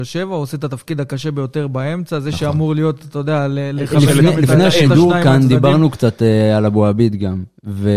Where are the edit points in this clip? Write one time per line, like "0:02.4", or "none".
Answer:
none